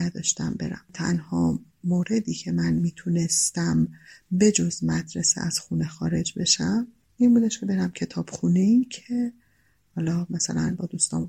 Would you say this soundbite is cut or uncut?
uncut